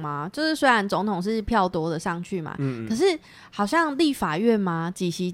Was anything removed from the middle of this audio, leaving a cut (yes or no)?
no